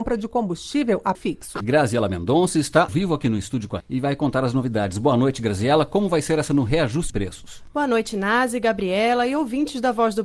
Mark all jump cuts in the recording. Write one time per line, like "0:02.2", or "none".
0:01.1
0:01.6
0:02.9
0:03.8
0:06.5
0:07.1